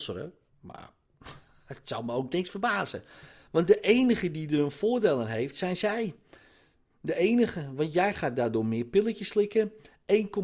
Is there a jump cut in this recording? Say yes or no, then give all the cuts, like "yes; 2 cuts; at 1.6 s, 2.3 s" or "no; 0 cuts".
no; 0 cuts